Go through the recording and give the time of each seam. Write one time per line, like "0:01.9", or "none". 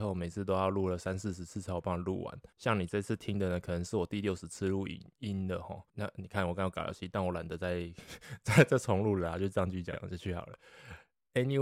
0:02.5
0:05.9